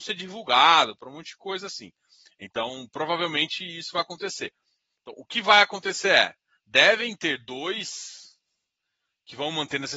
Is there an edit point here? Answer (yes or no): no